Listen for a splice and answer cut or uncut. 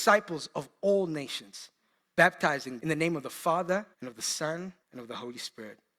cut